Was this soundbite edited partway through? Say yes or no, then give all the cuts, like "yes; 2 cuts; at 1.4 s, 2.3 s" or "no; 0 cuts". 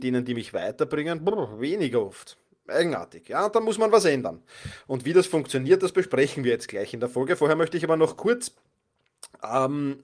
no; 0 cuts